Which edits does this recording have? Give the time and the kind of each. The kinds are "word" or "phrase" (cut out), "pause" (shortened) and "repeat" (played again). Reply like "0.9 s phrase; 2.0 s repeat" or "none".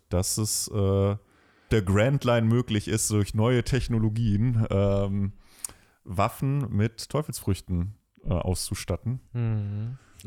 1.7 s word